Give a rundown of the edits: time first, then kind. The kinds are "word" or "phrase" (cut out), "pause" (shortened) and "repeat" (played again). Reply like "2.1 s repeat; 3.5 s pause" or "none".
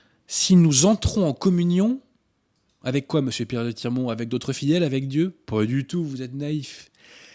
none